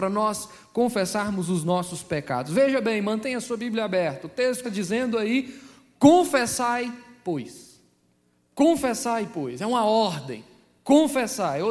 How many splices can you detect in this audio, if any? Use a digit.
1